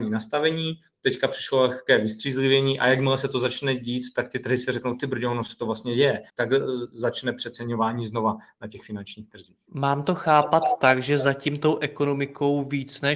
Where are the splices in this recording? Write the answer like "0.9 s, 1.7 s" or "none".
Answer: 6.3 s